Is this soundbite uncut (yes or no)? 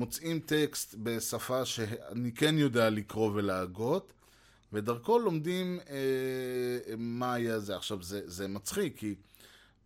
yes